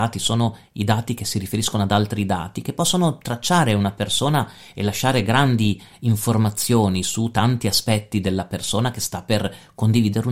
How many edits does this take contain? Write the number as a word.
zero